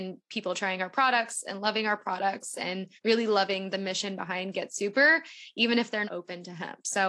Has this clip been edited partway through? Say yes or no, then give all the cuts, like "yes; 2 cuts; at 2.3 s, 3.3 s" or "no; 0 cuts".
yes; 2 cuts; at 3.0 s, 6.0 s